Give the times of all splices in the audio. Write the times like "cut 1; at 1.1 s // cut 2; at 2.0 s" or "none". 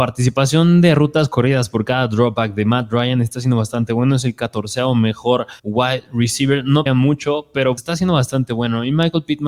cut 1; at 5.6 s // cut 2; at 6.9 s // cut 3; at 7.8 s